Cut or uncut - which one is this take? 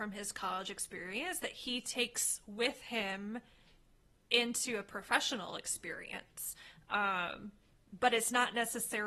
uncut